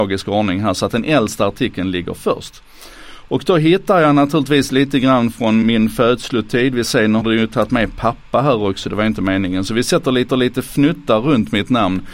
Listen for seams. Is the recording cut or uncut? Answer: cut